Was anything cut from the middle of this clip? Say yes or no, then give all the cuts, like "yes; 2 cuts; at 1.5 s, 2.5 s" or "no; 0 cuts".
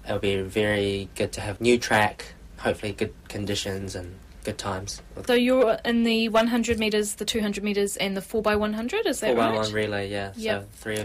yes; 2 cuts; at 1.6 s, 5.3 s